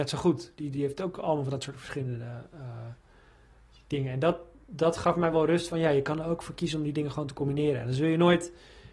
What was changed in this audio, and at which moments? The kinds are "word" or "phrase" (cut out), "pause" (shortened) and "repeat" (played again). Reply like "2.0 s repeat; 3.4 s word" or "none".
none